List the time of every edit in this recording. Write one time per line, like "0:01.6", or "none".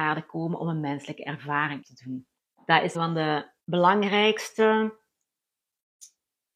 0:01.8
0:02.4
0:02.9
0:03.6